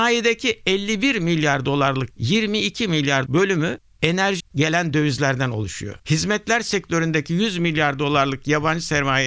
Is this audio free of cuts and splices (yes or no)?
no